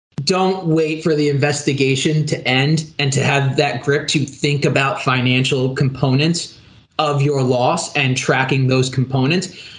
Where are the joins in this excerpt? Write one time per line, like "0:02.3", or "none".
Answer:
none